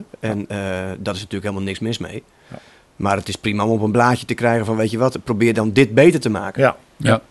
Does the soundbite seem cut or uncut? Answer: uncut